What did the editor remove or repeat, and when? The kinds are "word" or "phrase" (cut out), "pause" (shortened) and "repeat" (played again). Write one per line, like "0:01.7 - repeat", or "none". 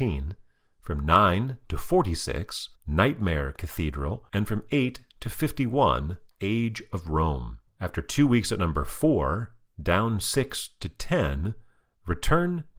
0:02.8 - pause
0:04.3 - pause
0:06.3 - pause
0:07.7 - pause